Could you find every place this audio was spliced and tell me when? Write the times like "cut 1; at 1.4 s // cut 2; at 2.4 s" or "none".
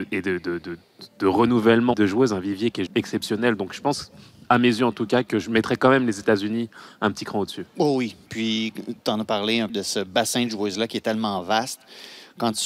cut 1; at 1.9 s // cut 2; at 2.9 s // cut 3; at 9.7 s